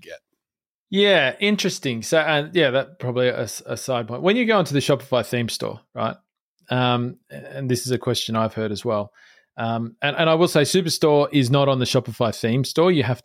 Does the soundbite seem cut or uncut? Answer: uncut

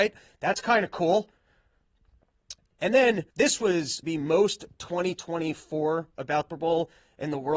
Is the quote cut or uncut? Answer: cut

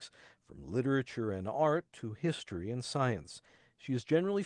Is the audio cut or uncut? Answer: uncut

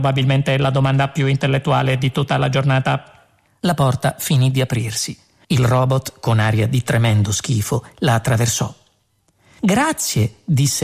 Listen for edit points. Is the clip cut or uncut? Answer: uncut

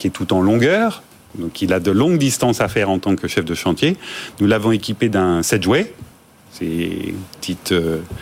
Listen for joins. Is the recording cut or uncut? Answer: uncut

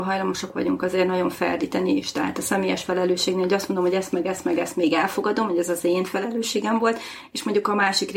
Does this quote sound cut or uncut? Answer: uncut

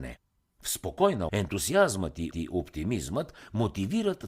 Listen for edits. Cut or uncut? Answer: cut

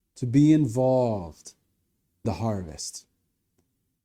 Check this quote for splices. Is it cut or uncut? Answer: cut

